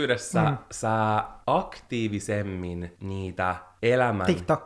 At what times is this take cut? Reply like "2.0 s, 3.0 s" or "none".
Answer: 3.0 s